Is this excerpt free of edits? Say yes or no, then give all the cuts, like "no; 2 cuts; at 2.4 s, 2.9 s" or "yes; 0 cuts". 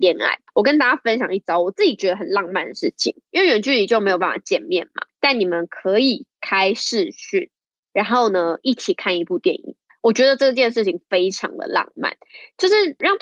yes; 0 cuts